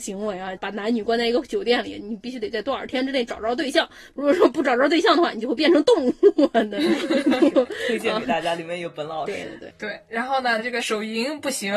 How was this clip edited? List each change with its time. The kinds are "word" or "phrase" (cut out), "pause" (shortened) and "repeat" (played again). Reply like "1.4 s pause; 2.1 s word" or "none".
9.7 s word